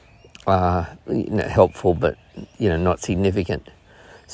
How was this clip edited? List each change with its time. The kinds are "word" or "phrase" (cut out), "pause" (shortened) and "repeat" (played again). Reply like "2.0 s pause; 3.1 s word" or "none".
none